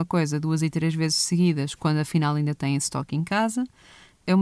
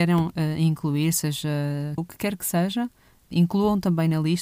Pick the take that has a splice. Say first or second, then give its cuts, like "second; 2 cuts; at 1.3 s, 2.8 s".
second; 1 cut; at 2.0 s